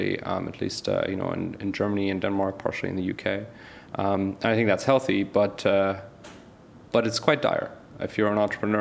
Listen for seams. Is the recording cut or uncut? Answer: uncut